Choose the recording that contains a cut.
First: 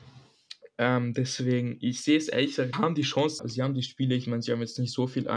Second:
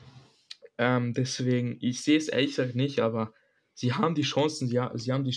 first; 2 cuts; at 2.7 s, 3.4 s

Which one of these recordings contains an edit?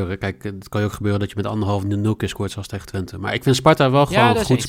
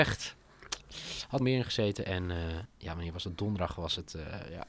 second; 2 cuts; at 1.4 s, 2.6 s

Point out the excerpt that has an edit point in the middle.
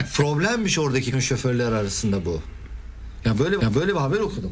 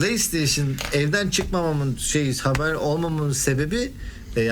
first; 2 cuts; at 1.1 s, 3.6 s

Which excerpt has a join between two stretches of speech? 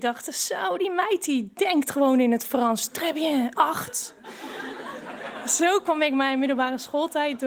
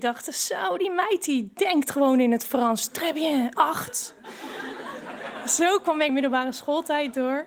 second; 1 cut; at 6.1 s

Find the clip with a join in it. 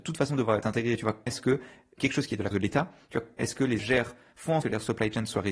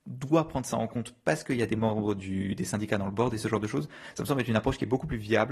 first; 6 cuts; at 1.3 s, 2.0 s, 2.5 s, 3.4 s, 3.8 s, 4.6 s

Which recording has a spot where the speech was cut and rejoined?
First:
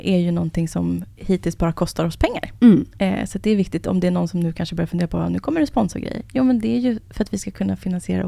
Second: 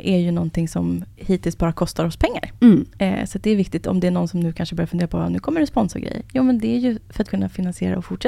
second; 1 cut; at 7.2 s

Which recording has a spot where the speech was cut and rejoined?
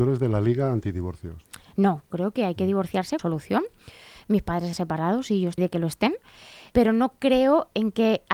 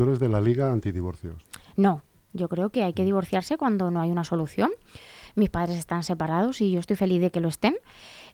first; 5 cuts; at 2.1 s, 3.2 s, 4.7 s, 5.6 s, 6.7 s

